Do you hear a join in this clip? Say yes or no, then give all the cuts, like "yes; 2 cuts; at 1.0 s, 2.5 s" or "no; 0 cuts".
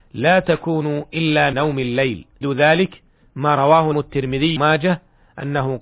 yes; 4 cuts; at 1.5 s, 2.4 s, 3.9 s, 4.6 s